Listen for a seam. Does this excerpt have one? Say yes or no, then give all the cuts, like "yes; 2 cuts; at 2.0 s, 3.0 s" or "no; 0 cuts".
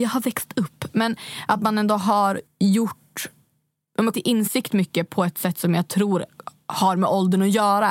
yes; 2 cuts; at 2.5 s, 4.1 s